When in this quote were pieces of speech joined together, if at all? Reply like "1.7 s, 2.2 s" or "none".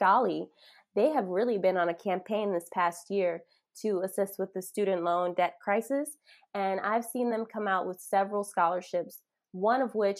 none